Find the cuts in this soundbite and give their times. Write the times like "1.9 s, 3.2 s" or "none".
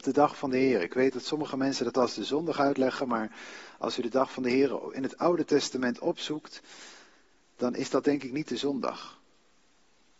none